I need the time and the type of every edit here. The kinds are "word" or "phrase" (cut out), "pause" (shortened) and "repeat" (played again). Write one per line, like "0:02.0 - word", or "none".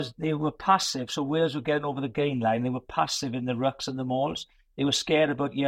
none